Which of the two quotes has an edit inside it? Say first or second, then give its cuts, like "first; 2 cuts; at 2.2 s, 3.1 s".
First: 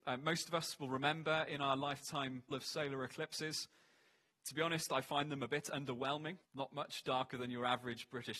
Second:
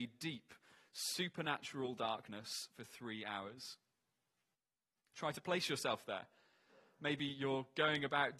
first; 2 cuts; at 2.5 s, 6.4 s